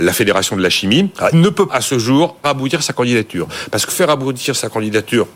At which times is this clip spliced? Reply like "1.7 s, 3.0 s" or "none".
1.3 s, 1.7 s, 2.4 s, 3.9 s